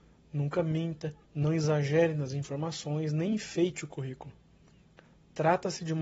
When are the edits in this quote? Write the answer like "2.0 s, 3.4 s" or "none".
1.2 s